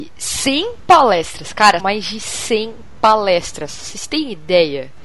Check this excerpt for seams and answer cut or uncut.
cut